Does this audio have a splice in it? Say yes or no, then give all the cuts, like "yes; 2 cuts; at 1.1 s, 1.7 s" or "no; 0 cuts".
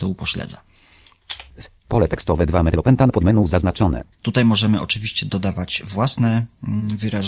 yes; 1 cut; at 4.1 s